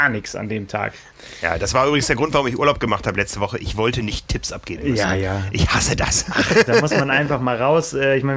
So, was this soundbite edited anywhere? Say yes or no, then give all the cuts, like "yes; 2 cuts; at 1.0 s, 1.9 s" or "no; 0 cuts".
no; 0 cuts